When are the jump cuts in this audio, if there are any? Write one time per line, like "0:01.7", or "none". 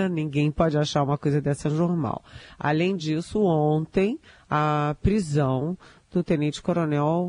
none